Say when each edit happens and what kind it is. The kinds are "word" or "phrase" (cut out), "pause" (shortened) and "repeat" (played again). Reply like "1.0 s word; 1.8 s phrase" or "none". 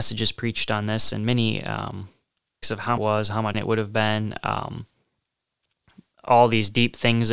2.6 s word; 3.0 s phrase; 3.5 s word